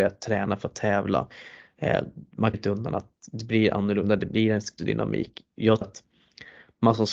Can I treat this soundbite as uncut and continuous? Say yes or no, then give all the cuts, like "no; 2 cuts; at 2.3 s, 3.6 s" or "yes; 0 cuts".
no; 3 cuts; at 2.5 s, 4.8 s, 5.8 s